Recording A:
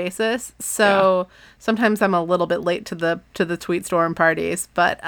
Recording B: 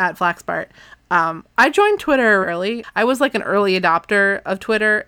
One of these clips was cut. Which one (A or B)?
B